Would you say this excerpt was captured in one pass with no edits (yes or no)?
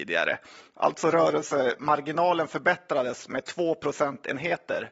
yes